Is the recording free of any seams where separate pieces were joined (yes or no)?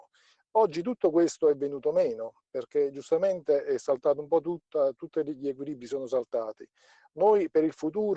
yes